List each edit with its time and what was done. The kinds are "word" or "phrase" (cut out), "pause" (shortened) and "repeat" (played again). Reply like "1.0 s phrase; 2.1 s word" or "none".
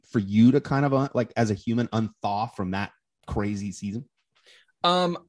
none